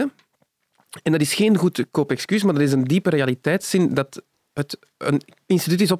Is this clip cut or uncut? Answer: uncut